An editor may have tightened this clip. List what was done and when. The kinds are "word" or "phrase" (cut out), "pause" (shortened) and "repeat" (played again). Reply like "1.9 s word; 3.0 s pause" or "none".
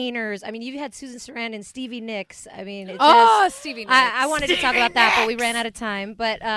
none